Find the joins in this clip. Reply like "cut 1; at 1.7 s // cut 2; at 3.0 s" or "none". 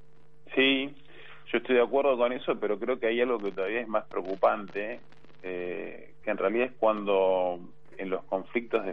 none

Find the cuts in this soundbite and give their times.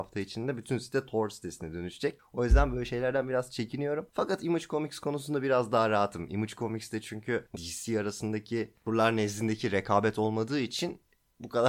cut 1; at 7.5 s

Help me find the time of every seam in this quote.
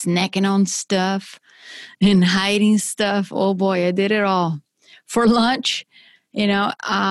none

